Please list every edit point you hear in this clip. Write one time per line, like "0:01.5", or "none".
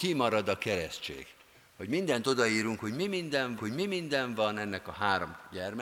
0:03.6